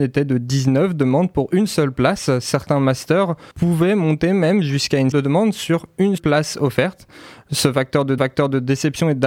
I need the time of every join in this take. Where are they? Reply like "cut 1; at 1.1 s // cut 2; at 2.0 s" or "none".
cut 1; at 3.5 s // cut 2; at 5.1 s // cut 3; at 6.2 s // cut 4; at 8.2 s